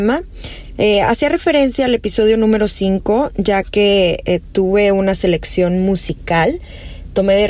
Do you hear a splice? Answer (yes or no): no